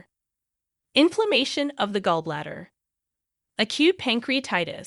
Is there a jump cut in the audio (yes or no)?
no